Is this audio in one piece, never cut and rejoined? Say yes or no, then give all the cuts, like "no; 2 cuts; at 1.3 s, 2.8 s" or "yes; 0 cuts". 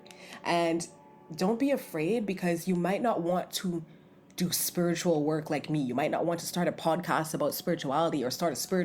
yes; 0 cuts